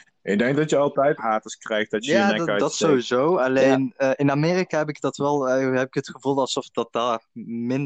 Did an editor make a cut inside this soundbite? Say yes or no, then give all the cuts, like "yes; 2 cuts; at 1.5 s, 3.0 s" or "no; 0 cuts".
yes; 2 cuts; at 1.2 s, 6.7 s